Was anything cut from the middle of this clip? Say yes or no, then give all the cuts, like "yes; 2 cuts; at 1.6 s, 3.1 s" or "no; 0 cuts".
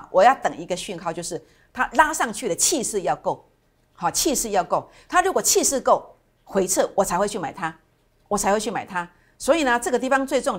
no; 0 cuts